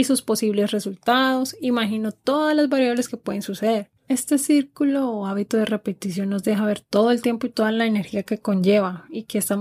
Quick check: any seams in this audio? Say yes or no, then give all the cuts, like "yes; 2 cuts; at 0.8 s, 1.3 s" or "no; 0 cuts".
no; 0 cuts